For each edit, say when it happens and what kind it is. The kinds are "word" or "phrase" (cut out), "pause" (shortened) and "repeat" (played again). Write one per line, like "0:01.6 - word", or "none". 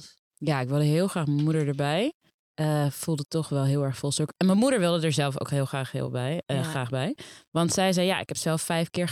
0:02.3 - pause